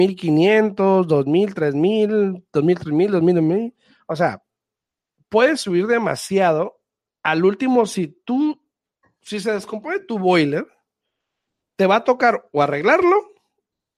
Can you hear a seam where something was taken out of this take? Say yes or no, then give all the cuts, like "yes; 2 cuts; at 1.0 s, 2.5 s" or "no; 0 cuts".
no; 0 cuts